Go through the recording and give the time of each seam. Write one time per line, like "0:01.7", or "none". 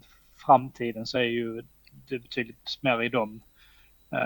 none